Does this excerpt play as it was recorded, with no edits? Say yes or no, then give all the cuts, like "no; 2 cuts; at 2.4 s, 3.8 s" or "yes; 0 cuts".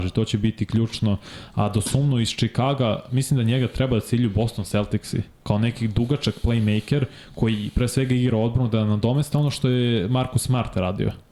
yes; 0 cuts